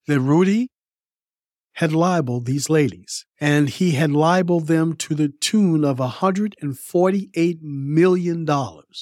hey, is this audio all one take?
no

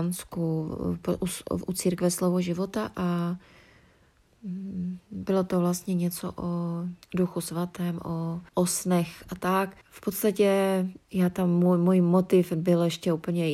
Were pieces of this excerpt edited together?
yes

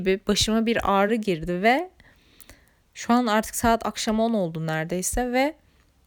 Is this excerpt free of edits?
yes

